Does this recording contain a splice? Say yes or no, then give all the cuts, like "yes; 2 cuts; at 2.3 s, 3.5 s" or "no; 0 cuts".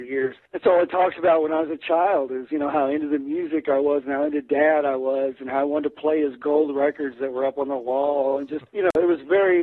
yes; 1 cut; at 8.7 s